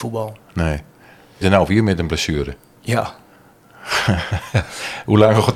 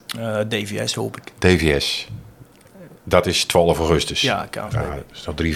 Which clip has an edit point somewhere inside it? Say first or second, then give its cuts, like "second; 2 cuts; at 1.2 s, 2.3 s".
first; 1 cut; at 1.4 s